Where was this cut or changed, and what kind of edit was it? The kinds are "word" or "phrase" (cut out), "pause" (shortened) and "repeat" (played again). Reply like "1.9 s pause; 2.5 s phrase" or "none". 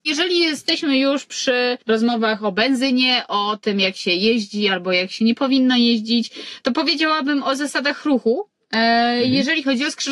1.8 s pause